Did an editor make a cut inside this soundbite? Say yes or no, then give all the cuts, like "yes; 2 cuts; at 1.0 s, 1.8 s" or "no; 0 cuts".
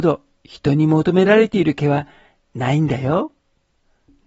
no; 0 cuts